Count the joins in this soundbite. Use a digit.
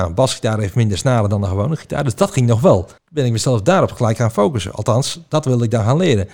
1